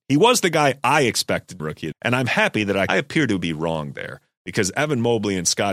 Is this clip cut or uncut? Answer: cut